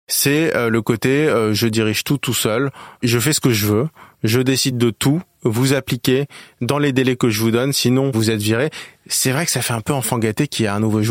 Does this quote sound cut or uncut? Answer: uncut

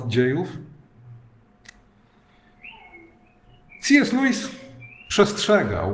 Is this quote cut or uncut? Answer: uncut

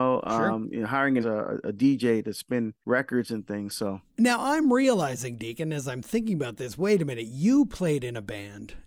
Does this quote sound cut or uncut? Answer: cut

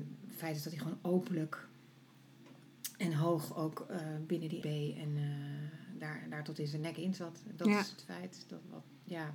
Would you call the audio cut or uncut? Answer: cut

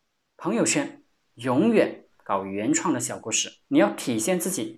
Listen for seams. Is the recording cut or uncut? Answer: cut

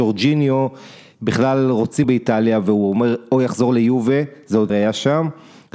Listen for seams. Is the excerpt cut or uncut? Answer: cut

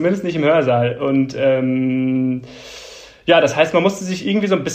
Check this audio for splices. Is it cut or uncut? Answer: uncut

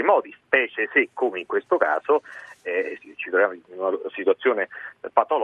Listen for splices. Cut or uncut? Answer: uncut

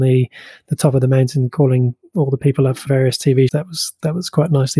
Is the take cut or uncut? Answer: cut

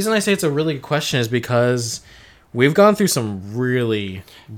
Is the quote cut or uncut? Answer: uncut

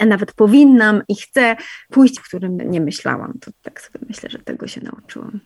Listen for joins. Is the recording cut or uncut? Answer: cut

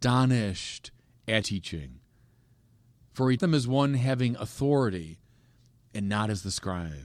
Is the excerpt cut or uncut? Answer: cut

